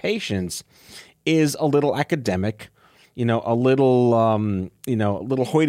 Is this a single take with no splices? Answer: yes; 0 cuts

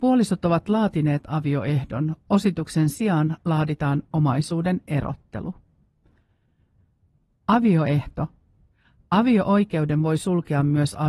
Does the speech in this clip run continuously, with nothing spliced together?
yes; 0 cuts

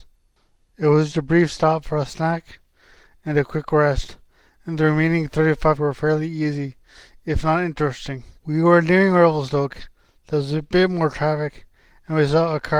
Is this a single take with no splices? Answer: no; 3 cuts; at 1.1 s, 5.8 s, 8.4 s

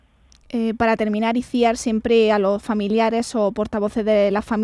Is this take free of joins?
yes; 0 cuts

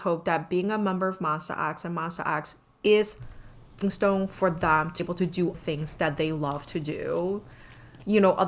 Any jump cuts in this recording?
yes; 3 cuts; at 3.8 s, 5.0 s, 5.5 s

